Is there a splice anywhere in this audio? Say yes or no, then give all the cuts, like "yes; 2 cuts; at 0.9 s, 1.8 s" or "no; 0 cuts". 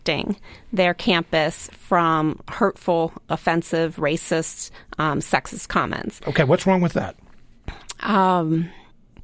no; 0 cuts